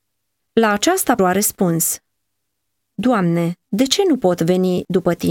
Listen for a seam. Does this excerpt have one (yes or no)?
yes